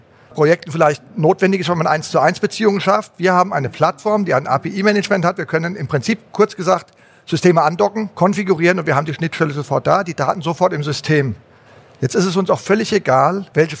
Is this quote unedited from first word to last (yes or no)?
yes